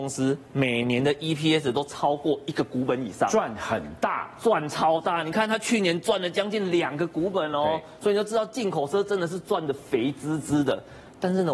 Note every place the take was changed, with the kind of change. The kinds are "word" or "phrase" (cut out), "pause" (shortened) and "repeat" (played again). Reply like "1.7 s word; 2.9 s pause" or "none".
none